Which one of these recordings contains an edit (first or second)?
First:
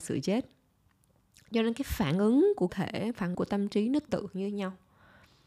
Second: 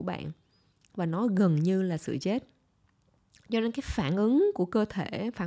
first